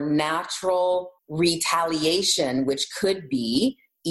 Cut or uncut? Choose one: cut